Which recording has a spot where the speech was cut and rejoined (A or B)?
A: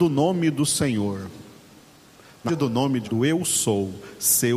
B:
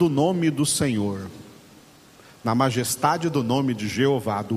A